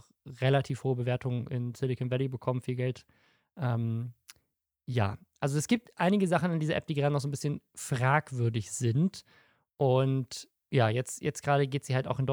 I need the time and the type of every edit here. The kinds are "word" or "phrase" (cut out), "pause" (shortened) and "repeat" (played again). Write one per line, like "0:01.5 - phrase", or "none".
none

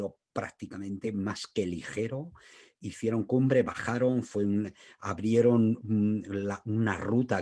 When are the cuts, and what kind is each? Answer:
none

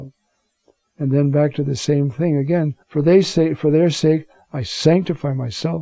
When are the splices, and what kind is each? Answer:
0:02.8 - pause

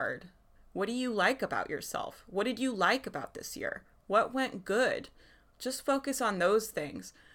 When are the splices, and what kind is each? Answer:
none

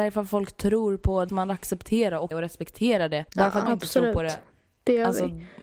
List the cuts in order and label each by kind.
0:01.3 - word
0:02.3 - phrase
0:03.3 - pause
0:03.7 - phrase

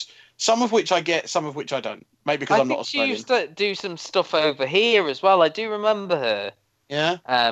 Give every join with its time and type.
0:02.1 - pause

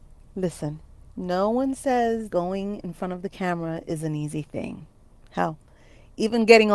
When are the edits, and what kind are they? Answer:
0:02.3 - word

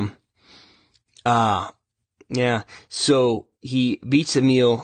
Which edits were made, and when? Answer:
0:03.5 - pause

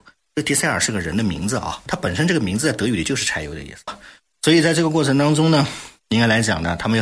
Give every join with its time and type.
0:01.9 - word
0:03.9 - word

